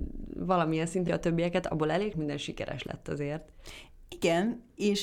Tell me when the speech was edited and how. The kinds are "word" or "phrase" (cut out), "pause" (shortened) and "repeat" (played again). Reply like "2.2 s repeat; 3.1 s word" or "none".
1.1 s word; 2.1 s word